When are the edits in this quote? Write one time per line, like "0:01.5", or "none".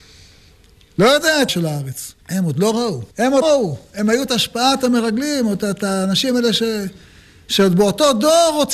0:01.5
0:02.2
0:03.1
0:03.4
0:04.3